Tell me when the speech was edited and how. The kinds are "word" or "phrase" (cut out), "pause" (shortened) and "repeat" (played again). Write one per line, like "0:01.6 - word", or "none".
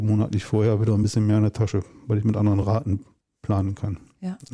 none